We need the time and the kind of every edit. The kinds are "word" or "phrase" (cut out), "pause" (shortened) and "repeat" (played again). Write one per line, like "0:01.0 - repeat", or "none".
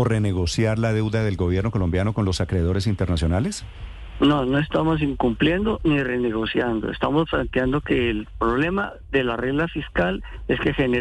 none